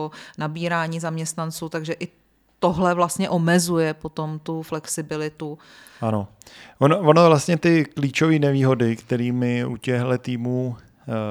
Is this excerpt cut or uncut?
uncut